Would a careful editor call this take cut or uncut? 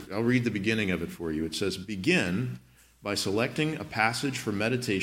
uncut